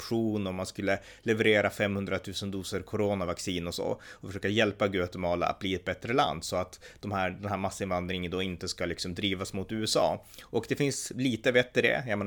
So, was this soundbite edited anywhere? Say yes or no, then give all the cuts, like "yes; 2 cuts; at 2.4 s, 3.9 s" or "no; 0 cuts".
no; 0 cuts